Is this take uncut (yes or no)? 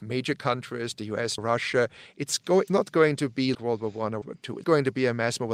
no